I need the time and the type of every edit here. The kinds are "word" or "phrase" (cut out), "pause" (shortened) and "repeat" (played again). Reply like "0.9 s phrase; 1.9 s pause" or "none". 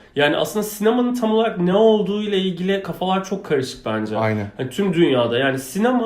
none